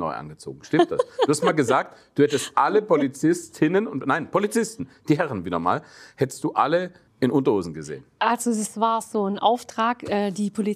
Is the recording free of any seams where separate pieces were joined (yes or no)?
no